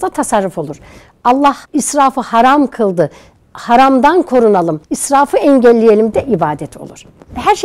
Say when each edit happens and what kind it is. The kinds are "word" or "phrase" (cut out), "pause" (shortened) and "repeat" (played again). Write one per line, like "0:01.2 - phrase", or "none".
0:01.6 - pause
0:04.8 - pause
0:06.1 - word

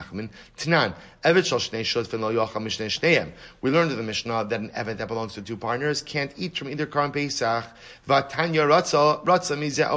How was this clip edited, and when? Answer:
none

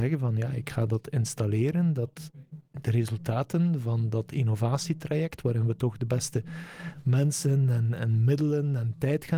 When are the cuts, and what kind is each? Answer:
none

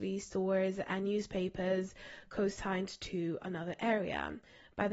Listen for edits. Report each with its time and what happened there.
none

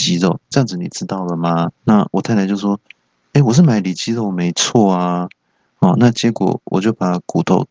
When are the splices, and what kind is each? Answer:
0:01.8 - pause

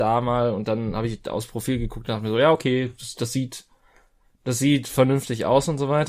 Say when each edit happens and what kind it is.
none

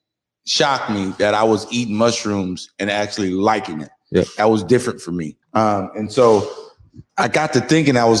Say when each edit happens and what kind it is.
0:05.4 - pause
0:07.1 - pause

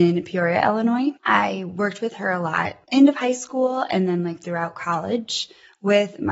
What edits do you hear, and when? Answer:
0:01.2 - pause
0:02.8 - pause

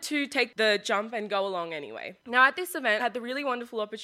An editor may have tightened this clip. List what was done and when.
0:02.2 - pause
0:03.0 - word

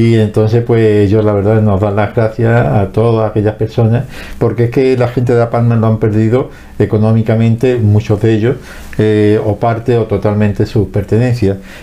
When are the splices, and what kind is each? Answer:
none

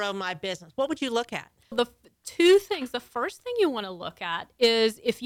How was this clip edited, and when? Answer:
0:01.7 - word

